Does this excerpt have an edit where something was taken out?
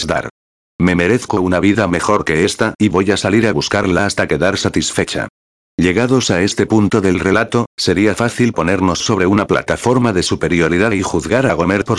no; 0 cuts

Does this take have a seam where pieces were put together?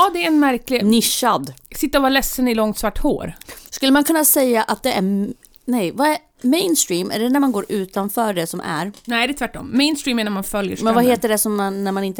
no; 0 cuts

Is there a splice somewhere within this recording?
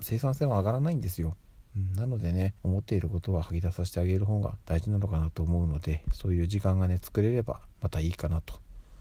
yes; 2 cuts; at 2.6 s, 4.6 s

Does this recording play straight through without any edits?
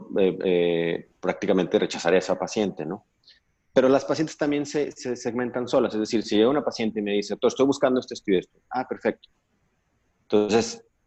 yes; 0 cuts

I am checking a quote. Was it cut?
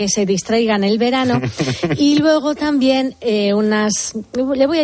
no; 0 cuts

